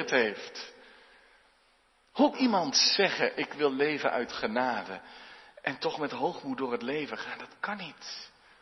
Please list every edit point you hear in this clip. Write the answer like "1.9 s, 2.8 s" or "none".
2.3 s